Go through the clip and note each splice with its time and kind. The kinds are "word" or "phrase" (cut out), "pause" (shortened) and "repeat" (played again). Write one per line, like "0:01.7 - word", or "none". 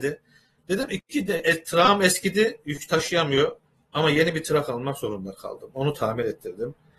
0:03.7 - pause